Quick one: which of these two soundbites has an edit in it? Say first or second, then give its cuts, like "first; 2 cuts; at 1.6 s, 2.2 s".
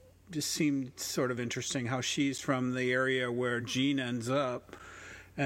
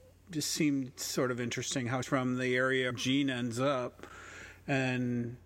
second; 2 cuts; at 2.0 s, 2.9 s